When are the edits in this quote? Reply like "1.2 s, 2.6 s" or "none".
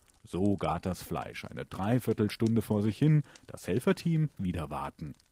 4.4 s